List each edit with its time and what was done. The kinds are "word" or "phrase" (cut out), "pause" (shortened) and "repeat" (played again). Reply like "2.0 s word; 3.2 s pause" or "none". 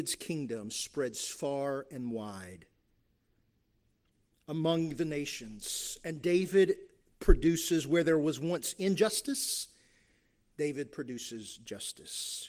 none